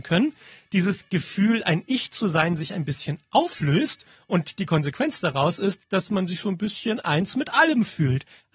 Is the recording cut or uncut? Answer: uncut